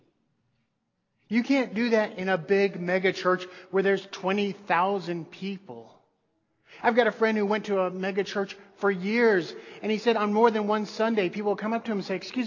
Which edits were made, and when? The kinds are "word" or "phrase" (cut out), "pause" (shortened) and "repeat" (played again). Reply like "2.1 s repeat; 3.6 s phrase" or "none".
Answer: none